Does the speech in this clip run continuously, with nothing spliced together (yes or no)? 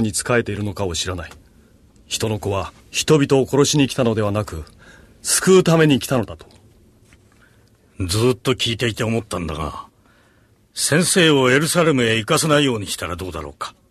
no